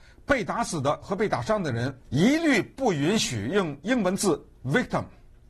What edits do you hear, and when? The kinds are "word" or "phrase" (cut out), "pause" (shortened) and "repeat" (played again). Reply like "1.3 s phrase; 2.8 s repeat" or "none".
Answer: 2.0 s pause